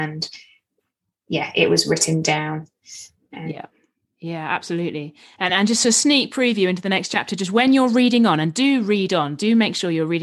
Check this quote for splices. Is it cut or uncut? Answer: uncut